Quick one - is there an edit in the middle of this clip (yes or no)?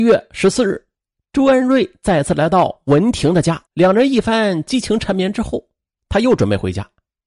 yes